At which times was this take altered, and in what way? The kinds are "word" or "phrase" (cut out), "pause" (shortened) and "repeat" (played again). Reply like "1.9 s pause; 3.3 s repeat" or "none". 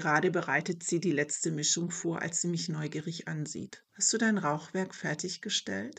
3.9 s pause